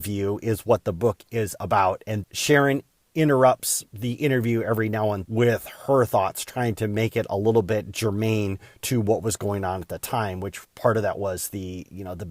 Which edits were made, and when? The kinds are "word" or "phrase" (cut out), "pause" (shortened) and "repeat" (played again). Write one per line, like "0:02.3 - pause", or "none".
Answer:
0:02.2 - word
0:05.2 - word

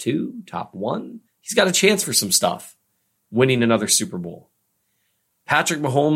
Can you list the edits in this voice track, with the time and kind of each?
0:01.2 - pause

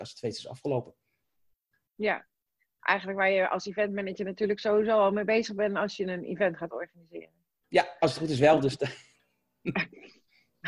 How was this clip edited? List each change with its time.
none

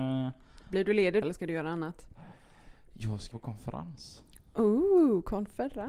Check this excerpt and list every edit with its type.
0:01.2 - word
0:03.3 - word

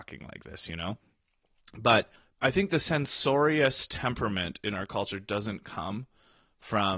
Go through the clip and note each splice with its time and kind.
0:02.2 - pause

